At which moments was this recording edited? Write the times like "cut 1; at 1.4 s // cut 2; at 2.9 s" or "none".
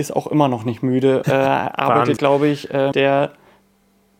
cut 1; at 1.2 s // cut 2; at 2.2 s // cut 3; at 2.9 s